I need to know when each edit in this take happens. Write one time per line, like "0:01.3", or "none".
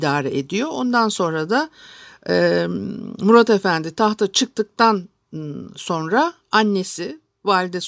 none